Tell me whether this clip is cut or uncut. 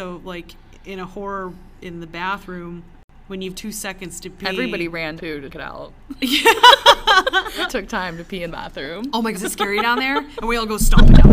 cut